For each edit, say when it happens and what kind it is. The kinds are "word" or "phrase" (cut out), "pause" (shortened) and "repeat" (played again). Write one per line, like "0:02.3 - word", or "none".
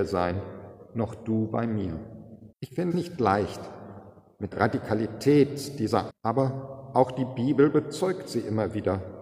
0:02.5 - pause
0:02.9 - word
0:04.5 - word
0:06.1 - phrase